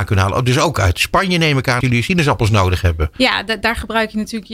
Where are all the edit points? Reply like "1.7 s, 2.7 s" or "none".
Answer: 1.8 s